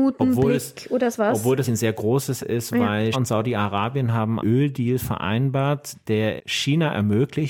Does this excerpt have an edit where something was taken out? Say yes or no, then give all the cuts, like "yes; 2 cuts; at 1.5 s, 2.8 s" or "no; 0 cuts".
yes; 6 cuts; at 1.1 s, 1.6 s, 2.4 s, 3.1 s, 4.4 s, 6.4 s